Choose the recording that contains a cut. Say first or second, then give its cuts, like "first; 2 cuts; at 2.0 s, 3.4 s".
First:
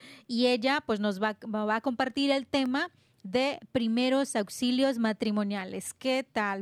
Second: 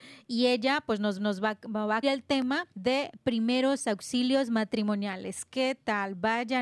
second; 3 cuts; at 1.2 s, 2.0 s, 2.7 s